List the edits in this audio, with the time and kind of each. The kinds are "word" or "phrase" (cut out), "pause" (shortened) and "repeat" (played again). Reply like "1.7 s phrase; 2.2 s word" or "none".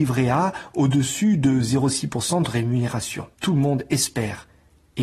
3.3 s pause

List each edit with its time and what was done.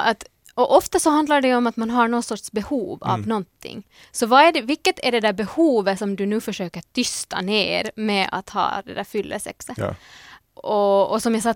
none

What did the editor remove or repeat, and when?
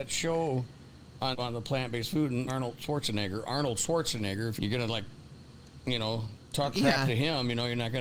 1.3 s word; 2.5 s word; 4.6 s phrase

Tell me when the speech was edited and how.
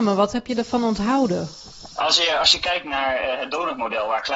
none

